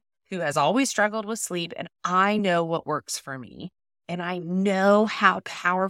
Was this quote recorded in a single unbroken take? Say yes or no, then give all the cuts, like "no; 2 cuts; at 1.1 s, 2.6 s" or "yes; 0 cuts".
yes; 0 cuts